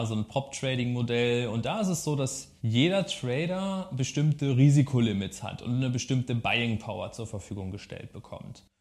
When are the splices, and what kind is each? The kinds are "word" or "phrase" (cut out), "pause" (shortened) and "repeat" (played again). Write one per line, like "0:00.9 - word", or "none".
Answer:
0:02.6 - pause